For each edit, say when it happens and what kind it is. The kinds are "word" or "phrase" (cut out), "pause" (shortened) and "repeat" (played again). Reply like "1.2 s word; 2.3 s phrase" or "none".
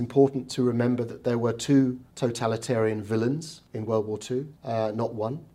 2.1 s pause; 3.7 s pause; 4.6 s pause

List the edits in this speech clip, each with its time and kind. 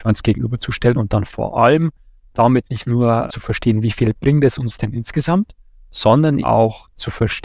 3.3 s word; 6.4 s word

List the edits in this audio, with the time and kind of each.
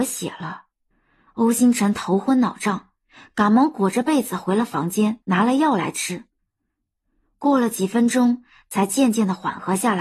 0.9 s pause; 5.2 s pause

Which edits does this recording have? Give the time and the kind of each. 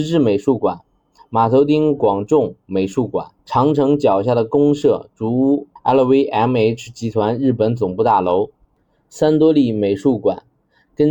3.4 s pause; 5.8 s pause

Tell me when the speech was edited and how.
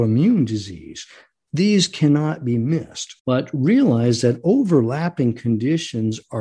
3.2 s pause

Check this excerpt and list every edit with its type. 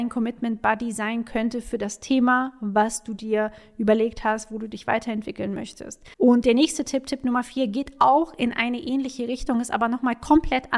6.1 s pause

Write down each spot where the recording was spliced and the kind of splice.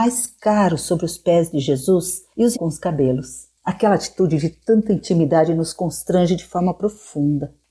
2.5 s word

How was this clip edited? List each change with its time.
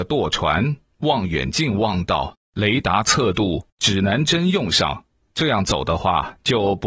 none

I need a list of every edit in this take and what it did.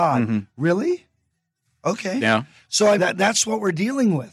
3.0 s word

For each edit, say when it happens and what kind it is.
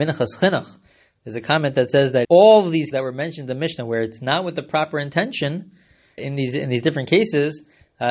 2.2 s word; 2.9 s word; 6.2 s word

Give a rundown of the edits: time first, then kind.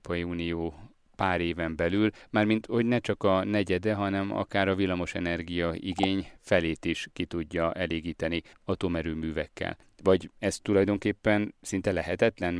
none

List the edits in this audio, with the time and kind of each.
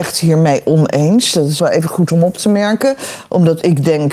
1.6 s word

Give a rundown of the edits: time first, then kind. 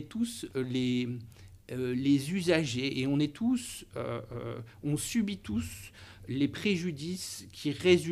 1.6 s pause

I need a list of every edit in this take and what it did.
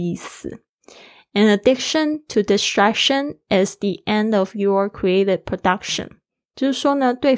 none

